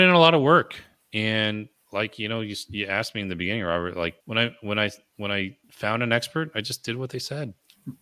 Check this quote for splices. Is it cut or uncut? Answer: cut